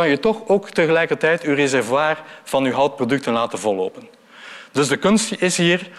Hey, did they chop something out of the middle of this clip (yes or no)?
no